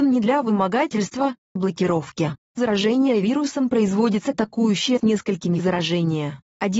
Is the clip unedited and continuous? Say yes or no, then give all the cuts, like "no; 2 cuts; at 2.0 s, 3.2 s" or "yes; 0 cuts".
no; 5 cuts; at 1.6 s, 2.6 s, 4.3 s, 5.0 s, 5.6 s